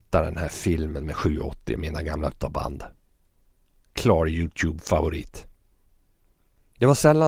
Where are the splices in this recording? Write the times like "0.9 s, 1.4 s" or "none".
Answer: 1.8 s, 2.3 s